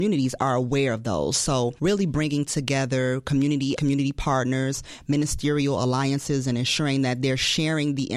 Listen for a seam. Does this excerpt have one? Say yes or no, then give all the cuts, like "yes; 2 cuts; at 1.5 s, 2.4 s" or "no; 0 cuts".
yes; 1 cut; at 3.8 s